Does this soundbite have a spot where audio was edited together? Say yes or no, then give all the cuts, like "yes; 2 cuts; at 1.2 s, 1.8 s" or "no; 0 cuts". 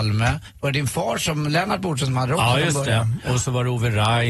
no; 0 cuts